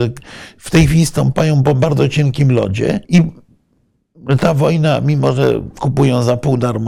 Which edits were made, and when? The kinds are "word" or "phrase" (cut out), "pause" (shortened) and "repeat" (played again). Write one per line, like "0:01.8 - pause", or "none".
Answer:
0:03.0 - pause